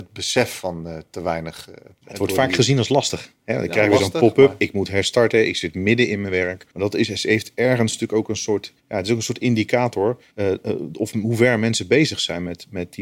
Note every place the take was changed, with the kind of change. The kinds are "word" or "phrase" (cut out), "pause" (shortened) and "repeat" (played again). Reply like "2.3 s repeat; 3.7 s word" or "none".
2.0 s pause; 6.7 s pause; 8.8 s pause; 10.3 s pause